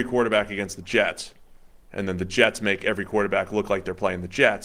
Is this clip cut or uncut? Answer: uncut